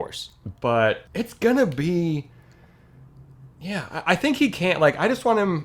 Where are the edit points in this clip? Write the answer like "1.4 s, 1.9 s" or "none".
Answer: 1.1 s, 3.5 s